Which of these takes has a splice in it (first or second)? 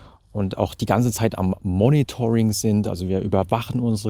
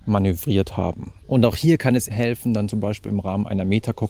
second